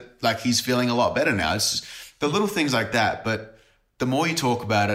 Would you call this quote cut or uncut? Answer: uncut